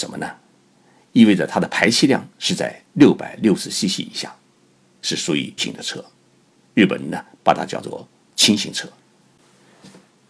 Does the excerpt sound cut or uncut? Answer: cut